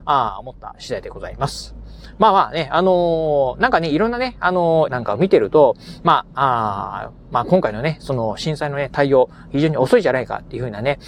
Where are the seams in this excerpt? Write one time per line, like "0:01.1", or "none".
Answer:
0:04.9